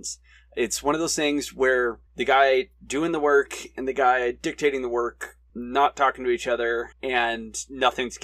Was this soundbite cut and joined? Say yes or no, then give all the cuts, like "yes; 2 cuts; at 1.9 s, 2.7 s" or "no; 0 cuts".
yes; 2 cuts; at 2.1 s, 6.9 s